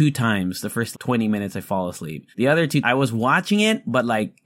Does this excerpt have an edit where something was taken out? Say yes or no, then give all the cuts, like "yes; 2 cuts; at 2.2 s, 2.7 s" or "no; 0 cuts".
yes; 3 cuts; at 0.9 s, 2.3 s, 2.8 s